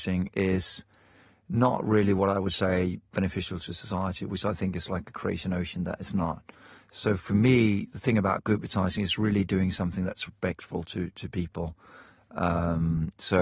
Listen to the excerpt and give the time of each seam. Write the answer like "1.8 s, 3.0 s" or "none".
none